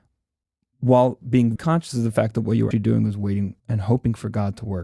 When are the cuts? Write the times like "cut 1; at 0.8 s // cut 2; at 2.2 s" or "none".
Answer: cut 1; at 1.6 s // cut 2; at 2.7 s // cut 3; at 3.6 s